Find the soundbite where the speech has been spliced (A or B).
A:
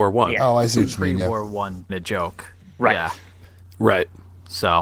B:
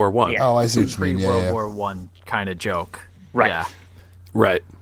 A